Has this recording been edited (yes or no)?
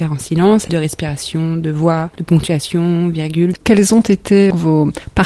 yes